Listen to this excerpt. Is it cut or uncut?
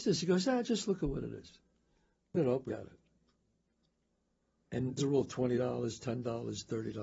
cut